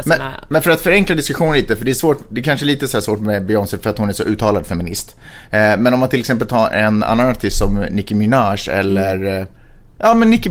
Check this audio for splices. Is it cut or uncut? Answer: uncut